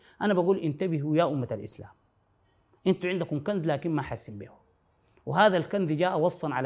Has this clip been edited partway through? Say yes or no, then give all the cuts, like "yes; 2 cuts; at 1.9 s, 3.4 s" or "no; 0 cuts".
no; 0 cuts